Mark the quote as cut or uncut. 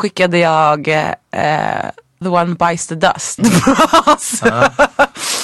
cut